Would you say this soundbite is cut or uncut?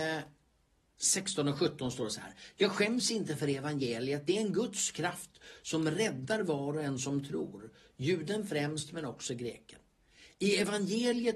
uncut